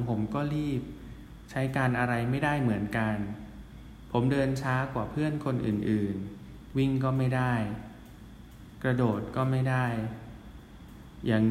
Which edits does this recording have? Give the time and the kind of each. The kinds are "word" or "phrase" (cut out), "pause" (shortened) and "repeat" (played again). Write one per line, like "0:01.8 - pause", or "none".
0:06.7 - word